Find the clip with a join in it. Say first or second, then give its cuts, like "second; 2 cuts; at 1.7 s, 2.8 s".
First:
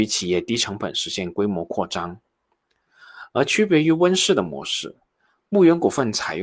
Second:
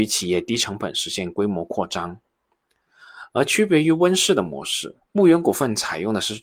second; 1 cut; at 5.1 s